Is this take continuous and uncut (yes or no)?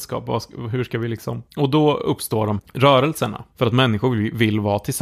no